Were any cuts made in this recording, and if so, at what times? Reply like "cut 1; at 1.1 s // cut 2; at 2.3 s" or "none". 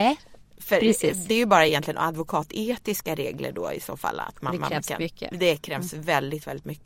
none